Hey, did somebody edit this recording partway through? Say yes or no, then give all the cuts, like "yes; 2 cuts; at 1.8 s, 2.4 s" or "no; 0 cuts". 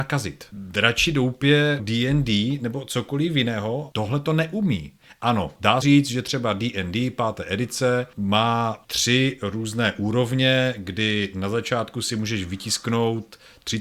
yes; 2 cuts; at 1.8 s, 5.8 s